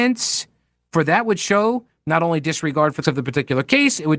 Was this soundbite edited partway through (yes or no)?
yes